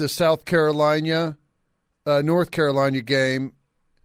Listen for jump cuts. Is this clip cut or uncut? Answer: uncut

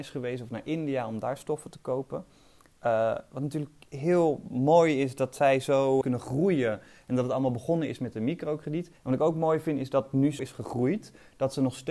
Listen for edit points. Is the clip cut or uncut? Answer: cut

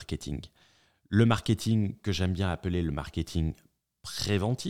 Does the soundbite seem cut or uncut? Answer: uncut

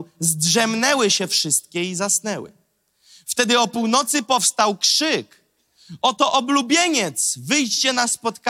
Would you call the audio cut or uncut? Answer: uncut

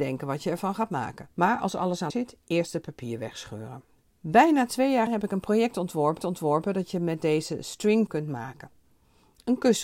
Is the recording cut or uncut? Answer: cut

